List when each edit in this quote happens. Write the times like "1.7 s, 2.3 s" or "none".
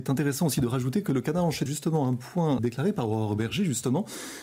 1.7 s, 2.6 s